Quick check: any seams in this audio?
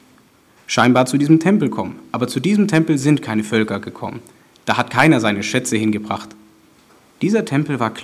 no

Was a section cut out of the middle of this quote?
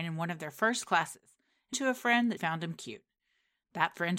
yes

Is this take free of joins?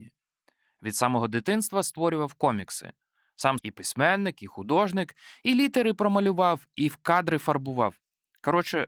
no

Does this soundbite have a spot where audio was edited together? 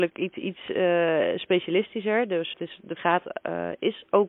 yes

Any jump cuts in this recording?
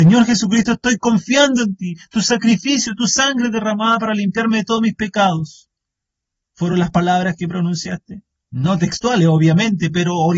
no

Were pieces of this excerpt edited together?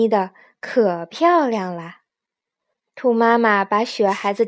no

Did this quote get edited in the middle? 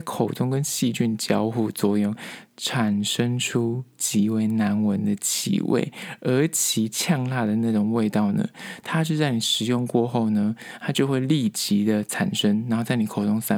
no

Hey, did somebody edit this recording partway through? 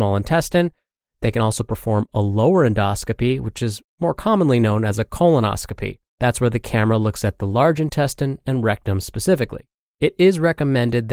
yes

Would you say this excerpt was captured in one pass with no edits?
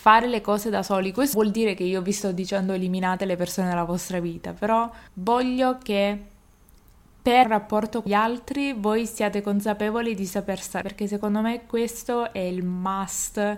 no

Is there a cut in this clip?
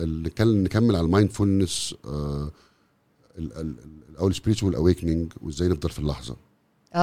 no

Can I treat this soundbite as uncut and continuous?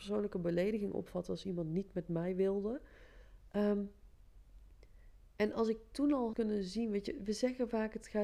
no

